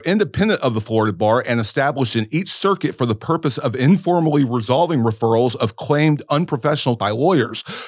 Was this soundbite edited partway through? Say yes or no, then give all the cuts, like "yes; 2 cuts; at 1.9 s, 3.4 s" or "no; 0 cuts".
yes; 1 cut; at 7.0 s